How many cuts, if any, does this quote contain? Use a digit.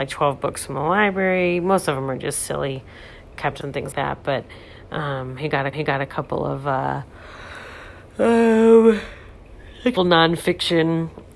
5